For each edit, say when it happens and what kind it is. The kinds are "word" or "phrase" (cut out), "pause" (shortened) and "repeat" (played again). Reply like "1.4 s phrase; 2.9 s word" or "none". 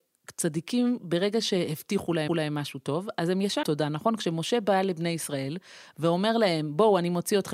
2.3 s repeat; 3.6 s word